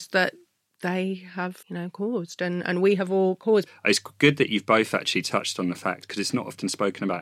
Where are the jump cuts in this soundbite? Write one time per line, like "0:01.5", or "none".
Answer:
0:01.6
0:02.6